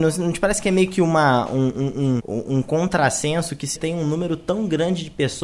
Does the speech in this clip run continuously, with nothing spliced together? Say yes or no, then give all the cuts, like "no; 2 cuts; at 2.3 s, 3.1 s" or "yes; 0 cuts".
no; 2 cuts; at 2.2 s, 3.8 s